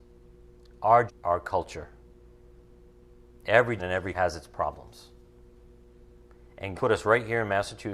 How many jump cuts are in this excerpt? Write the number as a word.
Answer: four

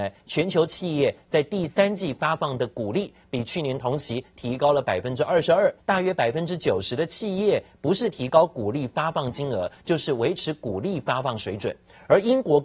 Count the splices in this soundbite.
one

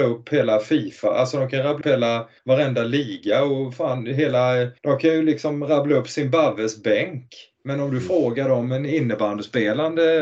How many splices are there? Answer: three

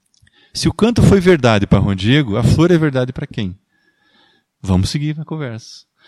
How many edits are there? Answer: zero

